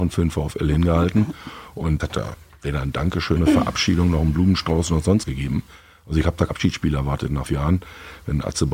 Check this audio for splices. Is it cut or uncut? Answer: cut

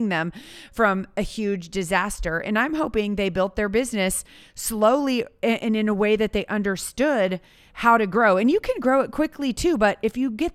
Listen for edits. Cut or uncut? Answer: uncut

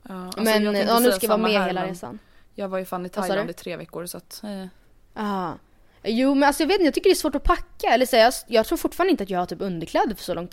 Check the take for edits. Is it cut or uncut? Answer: uncut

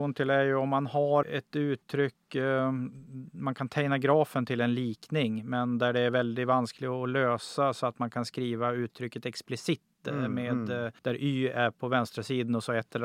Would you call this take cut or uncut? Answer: cut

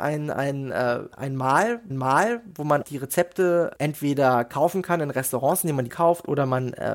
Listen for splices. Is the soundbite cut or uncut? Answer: cut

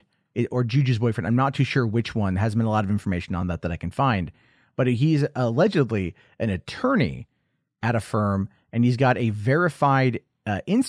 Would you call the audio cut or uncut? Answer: uncut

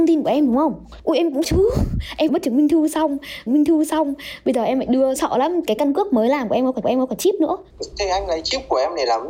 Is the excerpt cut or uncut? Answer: cut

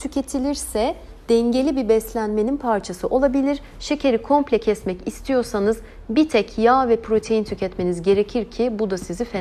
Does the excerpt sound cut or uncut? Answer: uncut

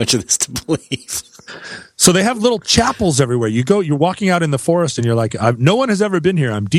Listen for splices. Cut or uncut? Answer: uncut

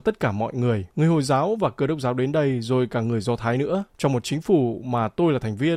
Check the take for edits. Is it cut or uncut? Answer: cut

